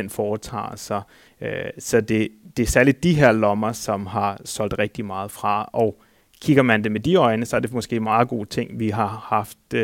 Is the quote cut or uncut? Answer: uncut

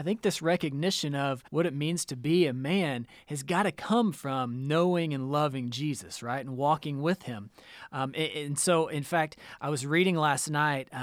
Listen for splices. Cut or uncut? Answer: cut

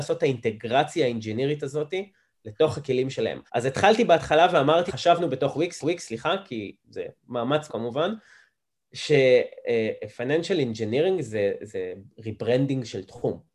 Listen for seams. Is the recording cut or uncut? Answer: cut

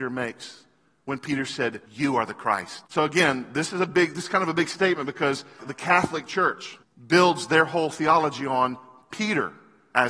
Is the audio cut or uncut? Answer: cut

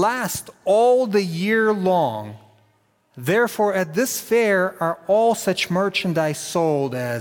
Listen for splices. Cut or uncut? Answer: uncut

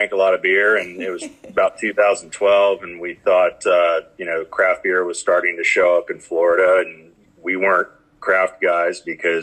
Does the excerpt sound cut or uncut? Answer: uncut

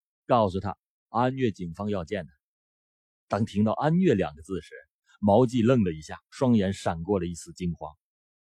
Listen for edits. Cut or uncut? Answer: cut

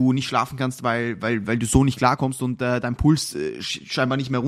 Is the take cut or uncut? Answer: uncut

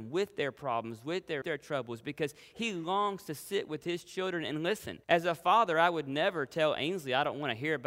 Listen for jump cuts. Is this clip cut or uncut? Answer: cut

